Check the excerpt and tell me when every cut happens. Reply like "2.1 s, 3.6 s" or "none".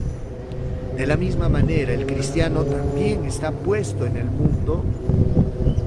none